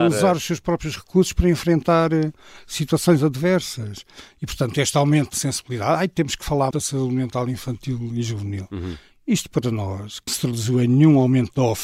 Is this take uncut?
no; 3 cuts; at 5.3 s, 6.7 s, 10.3 s

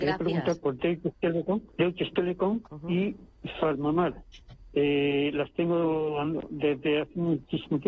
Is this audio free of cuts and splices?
no; 2 cuts; at 1.7 s, 2.7 s

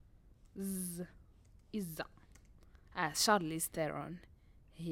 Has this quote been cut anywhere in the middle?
yes; 1 cut; at 2.8 s

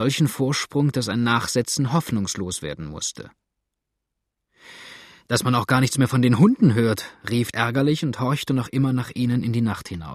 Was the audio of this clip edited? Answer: yes; 1 cut; at 7.5 s

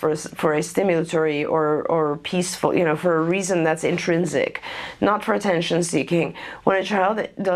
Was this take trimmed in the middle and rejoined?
no; 0 cuts

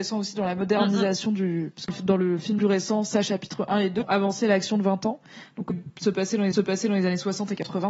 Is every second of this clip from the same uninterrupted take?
no; 5 cuts; at 1.9 s, 2.6 s, 4.0 s, 5.7 s, 6.5 s

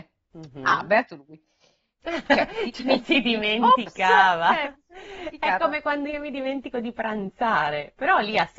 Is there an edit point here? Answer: no; 0 cuts

